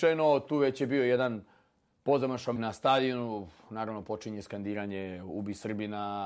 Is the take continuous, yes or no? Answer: no